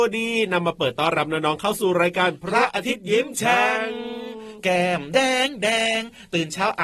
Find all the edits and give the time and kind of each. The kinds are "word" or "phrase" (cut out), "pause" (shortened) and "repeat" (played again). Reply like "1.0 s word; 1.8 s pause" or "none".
none